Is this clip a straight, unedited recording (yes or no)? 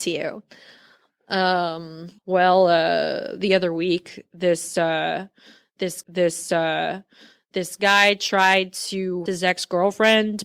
no